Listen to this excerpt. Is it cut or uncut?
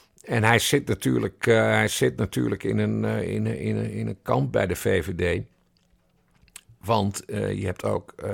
uncut